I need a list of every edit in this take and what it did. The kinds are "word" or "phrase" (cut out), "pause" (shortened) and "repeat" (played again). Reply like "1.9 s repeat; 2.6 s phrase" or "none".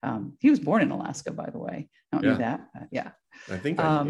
2.2 s phrase

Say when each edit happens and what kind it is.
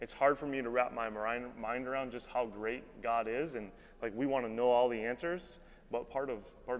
none

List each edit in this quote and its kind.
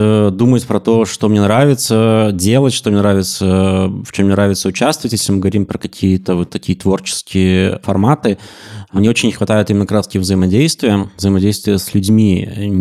none

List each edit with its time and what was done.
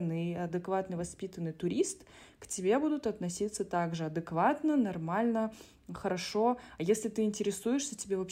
none

